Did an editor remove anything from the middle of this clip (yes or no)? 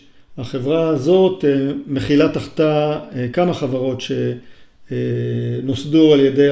no